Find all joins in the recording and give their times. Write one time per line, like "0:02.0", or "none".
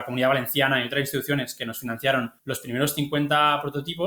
0:02.4